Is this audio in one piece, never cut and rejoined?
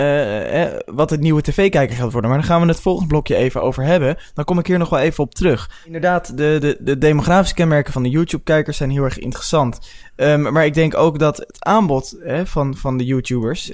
yes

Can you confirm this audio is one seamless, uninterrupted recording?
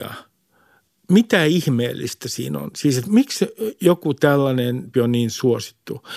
no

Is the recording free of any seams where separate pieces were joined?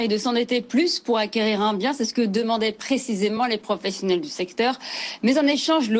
yes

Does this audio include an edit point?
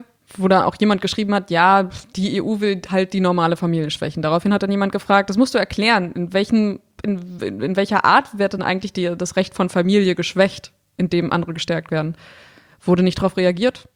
no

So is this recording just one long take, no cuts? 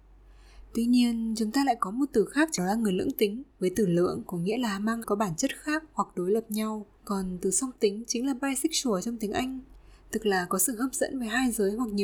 no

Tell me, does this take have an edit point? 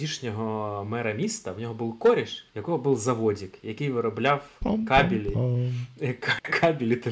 yes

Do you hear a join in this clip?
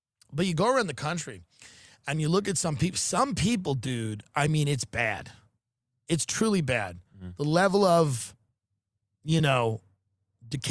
no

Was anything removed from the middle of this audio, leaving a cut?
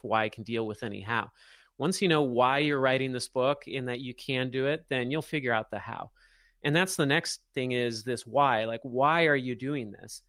no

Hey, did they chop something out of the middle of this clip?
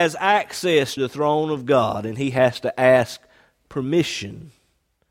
yes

